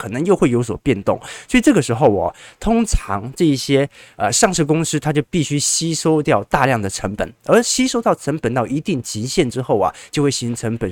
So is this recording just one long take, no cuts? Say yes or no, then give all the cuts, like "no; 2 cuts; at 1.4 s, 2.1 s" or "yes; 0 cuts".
yes; 0 cuts